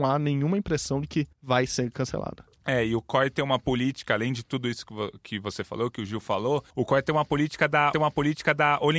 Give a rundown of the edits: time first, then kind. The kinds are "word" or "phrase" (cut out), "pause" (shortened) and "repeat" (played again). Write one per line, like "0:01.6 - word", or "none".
0:01.3 - pause
0:06.7 - pause
0:07.9 - repeat